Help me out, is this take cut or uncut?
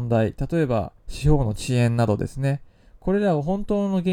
cut